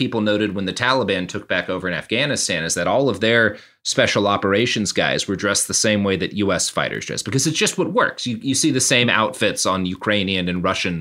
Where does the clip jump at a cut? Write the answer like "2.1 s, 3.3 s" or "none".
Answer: none